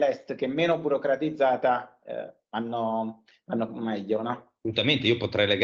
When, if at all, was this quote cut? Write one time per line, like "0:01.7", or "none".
none